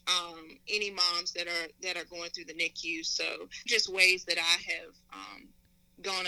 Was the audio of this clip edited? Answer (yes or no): yes